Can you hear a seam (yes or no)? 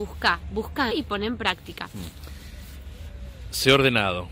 yes